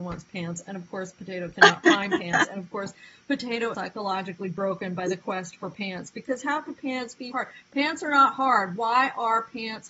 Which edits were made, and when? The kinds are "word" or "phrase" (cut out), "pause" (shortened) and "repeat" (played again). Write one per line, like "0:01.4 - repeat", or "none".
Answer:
0:03.7 - word
0:07.3 - word